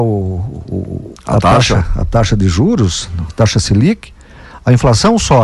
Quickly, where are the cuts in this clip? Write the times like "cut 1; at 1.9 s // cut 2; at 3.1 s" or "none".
none